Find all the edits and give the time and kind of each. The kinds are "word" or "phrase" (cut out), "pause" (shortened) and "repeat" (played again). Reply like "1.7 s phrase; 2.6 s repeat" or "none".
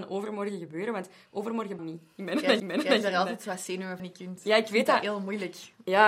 1.8 s word; 2.6 s repeat; 4.0 s phrase